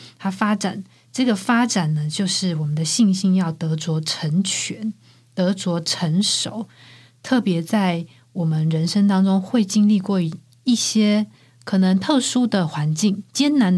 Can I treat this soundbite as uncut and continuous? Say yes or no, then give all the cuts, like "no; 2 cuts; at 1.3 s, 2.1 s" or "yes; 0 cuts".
yes; 0 cuts